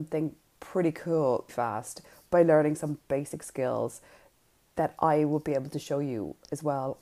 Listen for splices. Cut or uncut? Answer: cut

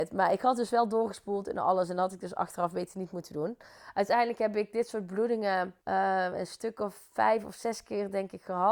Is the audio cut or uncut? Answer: cut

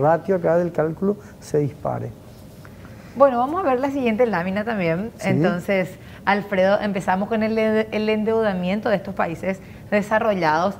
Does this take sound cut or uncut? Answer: uncut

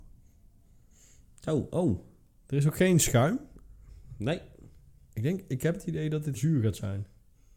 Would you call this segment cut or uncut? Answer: cut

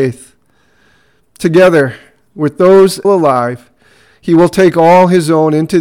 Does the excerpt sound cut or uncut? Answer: cut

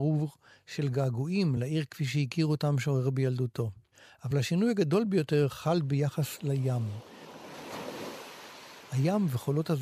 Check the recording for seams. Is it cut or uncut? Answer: uncut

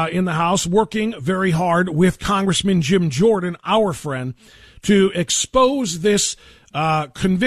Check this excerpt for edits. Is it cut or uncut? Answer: uncut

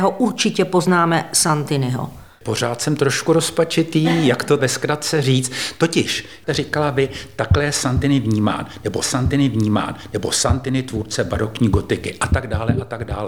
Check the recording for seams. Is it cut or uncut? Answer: cut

